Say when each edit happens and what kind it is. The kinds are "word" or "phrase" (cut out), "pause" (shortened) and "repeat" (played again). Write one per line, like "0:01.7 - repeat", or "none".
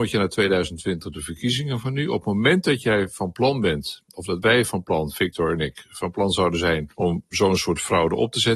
0:06.9 - pause